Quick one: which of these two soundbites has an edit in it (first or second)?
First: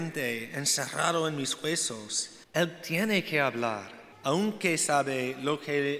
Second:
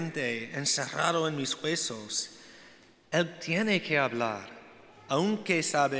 first